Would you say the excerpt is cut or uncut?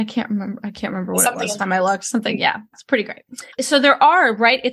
cut